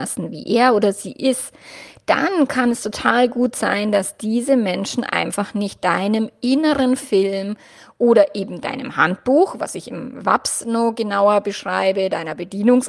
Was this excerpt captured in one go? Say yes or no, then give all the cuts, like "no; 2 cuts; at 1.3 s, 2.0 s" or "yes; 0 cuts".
yes; 0 cuts